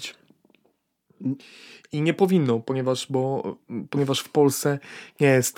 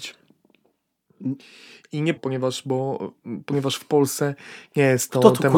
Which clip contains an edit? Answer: second; 1 cut; at 2.2 s

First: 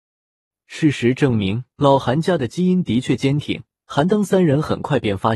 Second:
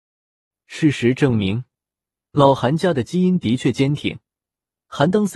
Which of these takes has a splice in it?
first; 2 cuts; at 1.7 s, 3.8 s

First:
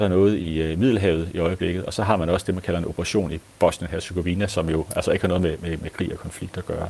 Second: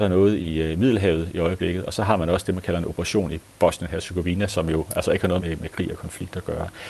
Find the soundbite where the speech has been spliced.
second; 1 cut; at 5.4 s

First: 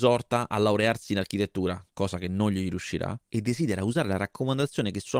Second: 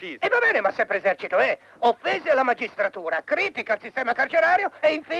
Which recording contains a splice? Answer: first; 1 cut; at 3.2 s

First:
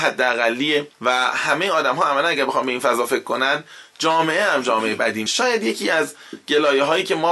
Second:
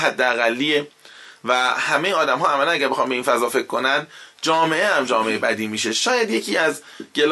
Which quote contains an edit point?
first; 2 cuts; at 0.9 s, 5.3 s

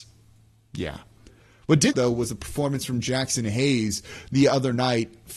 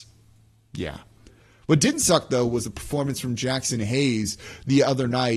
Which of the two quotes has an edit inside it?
first; 1 cut; at 1.9 s

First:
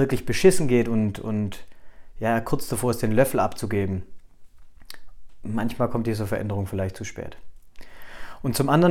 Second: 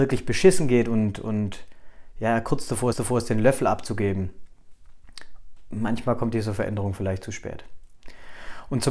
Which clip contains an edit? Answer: second; 1 cut; at 2.9 s

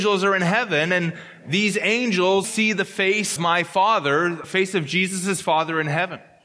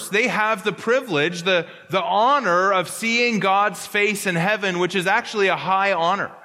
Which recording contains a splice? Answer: first; 3 cuts; at 2.4 s, 3.4 s, 4.4 s

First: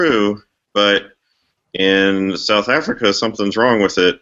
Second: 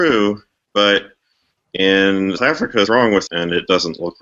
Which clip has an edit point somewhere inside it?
second; 3 cuts; at 2.4 s, 2.9 s, 3.3 s

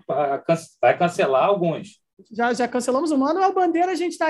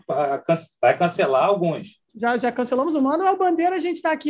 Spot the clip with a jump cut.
second; 1 cut; at 2.1 s

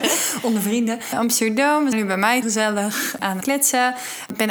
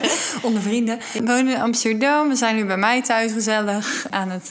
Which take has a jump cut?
first; 4 cuts; at 1.1 s, 1.9 s, 2.4 s, 3.4 s

